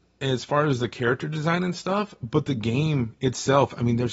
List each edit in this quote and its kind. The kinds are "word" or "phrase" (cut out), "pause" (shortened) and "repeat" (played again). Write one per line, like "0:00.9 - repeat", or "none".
none